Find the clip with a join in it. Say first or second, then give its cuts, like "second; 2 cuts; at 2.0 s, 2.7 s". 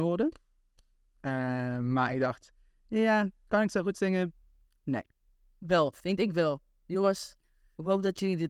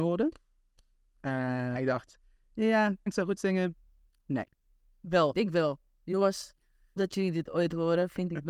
second; 4 cuts; at 1.7 s, 3.1 s, 5.3 s, 7.0 s